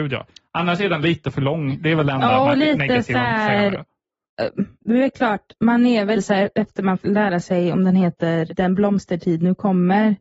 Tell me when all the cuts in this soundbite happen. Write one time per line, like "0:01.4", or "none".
0:04.7
0:06.2
0:07.0
0:08.5